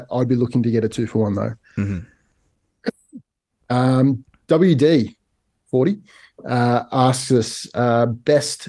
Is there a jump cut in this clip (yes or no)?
no